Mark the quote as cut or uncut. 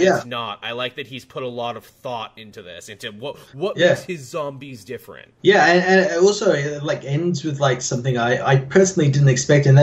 cut